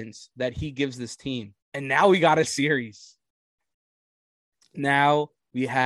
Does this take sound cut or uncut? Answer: cut